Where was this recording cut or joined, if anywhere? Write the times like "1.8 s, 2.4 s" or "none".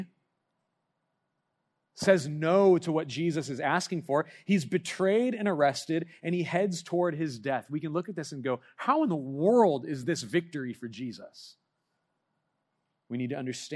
none